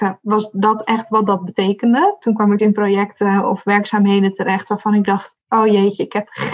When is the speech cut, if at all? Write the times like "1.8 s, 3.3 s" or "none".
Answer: 2.6 s